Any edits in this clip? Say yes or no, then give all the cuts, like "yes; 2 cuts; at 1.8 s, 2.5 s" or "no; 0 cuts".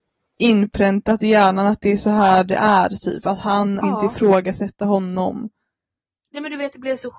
yes; 1 cut; at 3.8 s